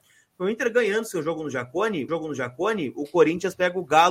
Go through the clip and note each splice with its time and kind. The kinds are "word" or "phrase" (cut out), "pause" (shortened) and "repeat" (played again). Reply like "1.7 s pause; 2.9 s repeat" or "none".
2.1 s repeat